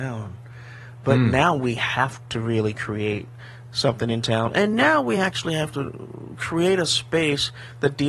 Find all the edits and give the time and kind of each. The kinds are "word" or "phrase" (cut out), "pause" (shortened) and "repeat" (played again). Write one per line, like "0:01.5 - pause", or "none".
none